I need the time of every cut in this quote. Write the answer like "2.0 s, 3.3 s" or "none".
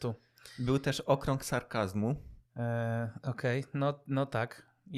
2.5 s